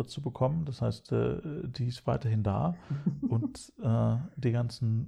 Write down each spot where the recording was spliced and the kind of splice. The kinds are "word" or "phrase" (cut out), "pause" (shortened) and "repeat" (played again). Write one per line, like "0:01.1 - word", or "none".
none